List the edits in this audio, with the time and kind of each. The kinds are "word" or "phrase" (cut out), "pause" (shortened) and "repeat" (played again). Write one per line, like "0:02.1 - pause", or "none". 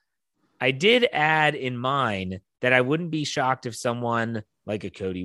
none